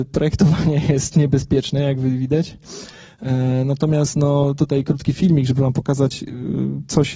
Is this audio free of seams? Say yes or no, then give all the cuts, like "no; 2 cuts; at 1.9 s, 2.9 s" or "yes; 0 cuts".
yes; 0 cuts